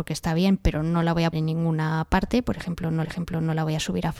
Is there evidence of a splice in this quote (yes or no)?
yes